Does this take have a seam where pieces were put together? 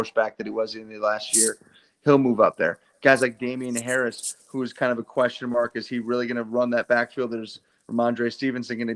no; 0 cuts

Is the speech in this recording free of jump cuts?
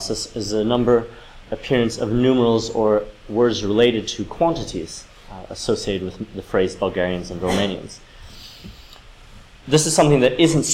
no; 1 cut; at 1.4 s

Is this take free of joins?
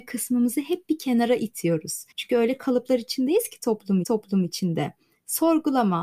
no; 2 cuts; at 2.1 s, 4.0 s

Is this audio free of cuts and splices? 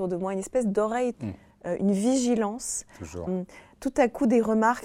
no; 2 cuts; at 1.1 s, 3.3 s

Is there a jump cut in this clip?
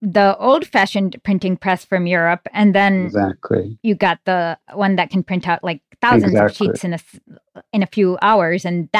no; 0 cuts

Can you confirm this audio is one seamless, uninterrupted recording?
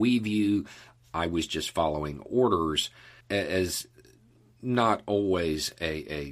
no; 1 cut; at 3.2 s

